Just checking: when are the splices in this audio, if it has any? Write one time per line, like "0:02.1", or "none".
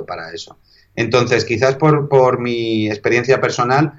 none